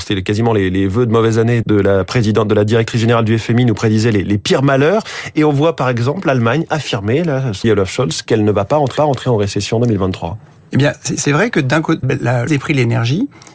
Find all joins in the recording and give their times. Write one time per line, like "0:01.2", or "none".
0:01.6
0:07.6
0:09.0
0:12.0
0:12.5

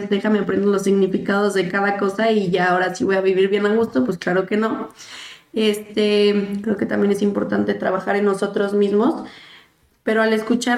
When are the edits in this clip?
none

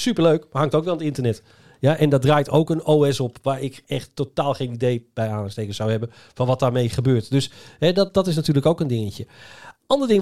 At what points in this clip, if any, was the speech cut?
none

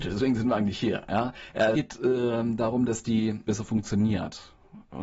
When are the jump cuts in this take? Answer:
0:01.7
0:03.5

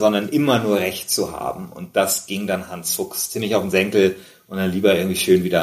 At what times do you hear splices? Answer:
none

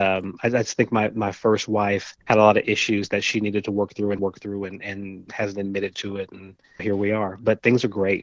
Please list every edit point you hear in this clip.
0:02.2
0:04.2
0:06.8

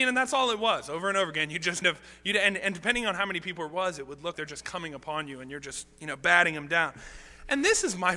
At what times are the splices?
0:01.8
0:04.3

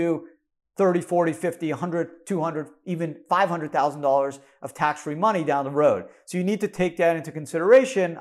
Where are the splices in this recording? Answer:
none

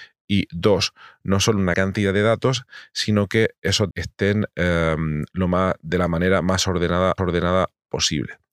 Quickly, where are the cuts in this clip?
0:01.7
0:03.9
0:07.2

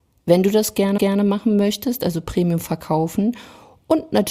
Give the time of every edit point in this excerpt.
0:01.0

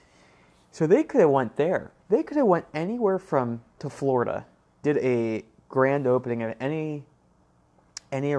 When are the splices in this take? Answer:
0:02.0
0:03.8
0:04.8

